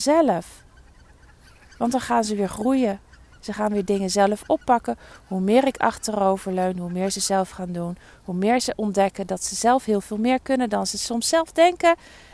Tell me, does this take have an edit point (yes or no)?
no